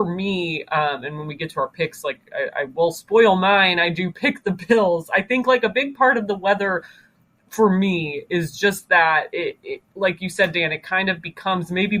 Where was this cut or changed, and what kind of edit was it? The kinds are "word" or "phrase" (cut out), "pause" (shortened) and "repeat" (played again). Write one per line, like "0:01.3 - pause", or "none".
none